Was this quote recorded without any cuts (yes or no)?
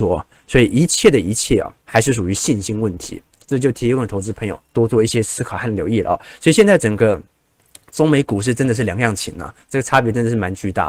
no